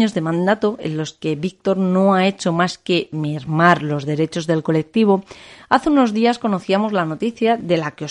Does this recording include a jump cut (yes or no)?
no